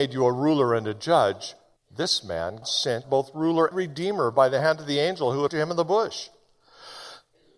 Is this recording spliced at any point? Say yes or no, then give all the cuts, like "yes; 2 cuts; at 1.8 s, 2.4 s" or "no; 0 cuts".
yes; 5 cuts; at 1.8 s, 2.6 s, 3.0 s, 3.7 s, 5.5 s